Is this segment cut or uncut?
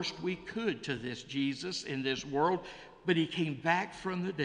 uncut